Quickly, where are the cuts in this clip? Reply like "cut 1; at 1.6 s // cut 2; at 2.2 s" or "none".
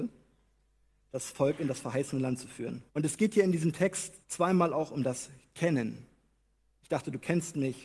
cut 1; at 2.9 s // cut 2; at 4.2 s

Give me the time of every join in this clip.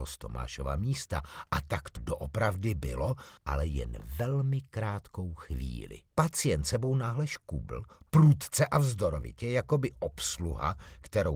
cut 1; at 2.0 s // cut 2; at 3.4 s // cut 3; at 6.1 s

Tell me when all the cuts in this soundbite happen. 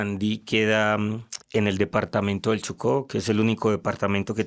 cut 1; at 1.4 s

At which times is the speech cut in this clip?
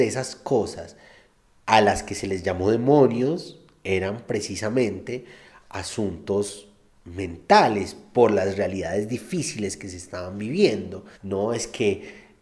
cut 1; at 11.1 s

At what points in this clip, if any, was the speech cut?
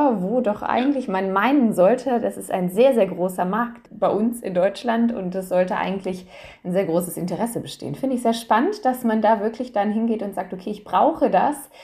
none

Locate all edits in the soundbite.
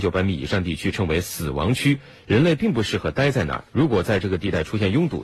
cut 1; at 3.7 s

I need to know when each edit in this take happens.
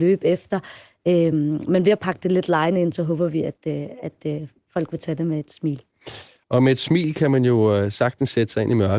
none

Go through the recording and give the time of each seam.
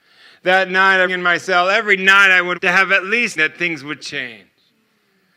cut 1; at 1.0 s // cut 2; at 2.5 s // cut 3; at 3.4 s

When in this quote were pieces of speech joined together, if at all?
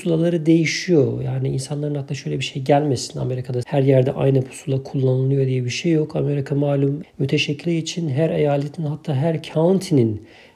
cut 1; at 3.6 s // cut 2; at 7.0 s // cut 3; at 7.6 s

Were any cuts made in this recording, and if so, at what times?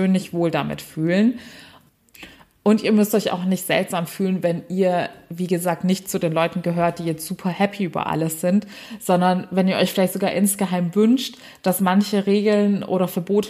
none

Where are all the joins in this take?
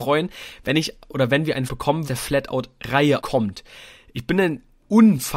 cut 1; at 1.7 s // cut 2; at 2.1 s // cut 3; at 3.2 s

